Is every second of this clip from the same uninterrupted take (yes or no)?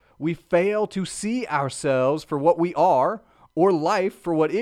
yes